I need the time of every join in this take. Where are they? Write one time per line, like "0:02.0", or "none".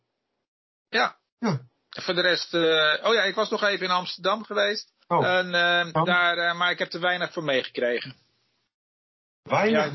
0:01.3
0:05.0

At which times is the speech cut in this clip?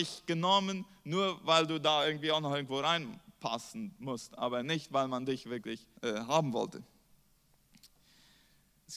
0:06.0

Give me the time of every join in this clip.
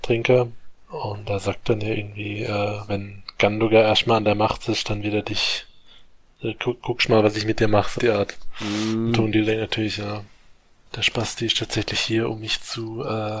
0:08.0

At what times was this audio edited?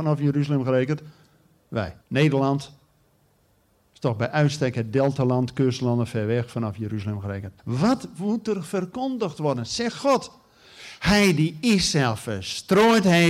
0:02.0
0:07.6

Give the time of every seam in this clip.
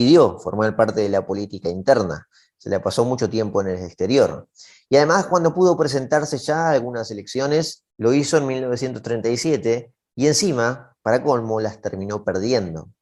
none

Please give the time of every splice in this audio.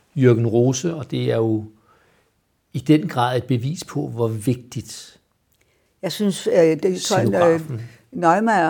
none

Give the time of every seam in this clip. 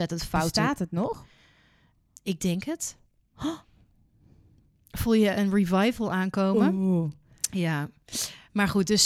none

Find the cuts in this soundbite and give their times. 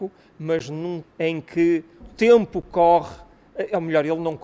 0:01.0
0:02.0

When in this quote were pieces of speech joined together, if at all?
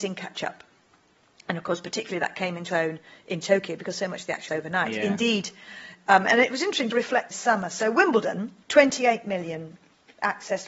0:02.7
0:04.5
0:06.9
0:07.3
0:08.6

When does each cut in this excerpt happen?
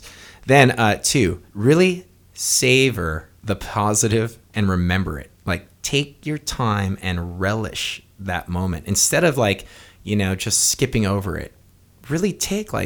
0:01.5
0:03.4
0:04.4
0:05.3

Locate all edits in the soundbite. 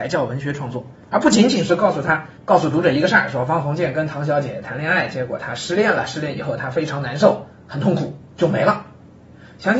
0:01.0
0:02.4
0:08.3

